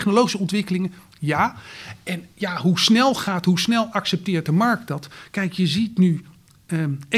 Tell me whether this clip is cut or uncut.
uncut